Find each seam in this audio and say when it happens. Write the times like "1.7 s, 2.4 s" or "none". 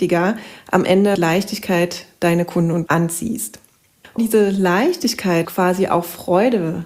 1.2 s, 2.9 s, 4.2 s, 5.4 s